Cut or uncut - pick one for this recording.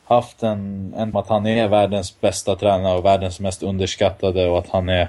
cut